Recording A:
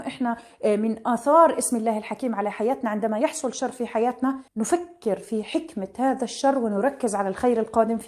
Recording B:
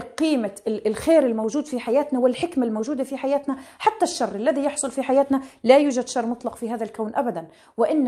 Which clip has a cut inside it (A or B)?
A